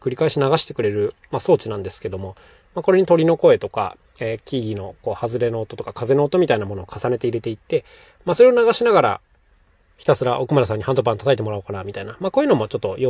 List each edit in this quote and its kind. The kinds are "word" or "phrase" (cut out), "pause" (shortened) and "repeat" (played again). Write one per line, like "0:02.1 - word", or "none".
none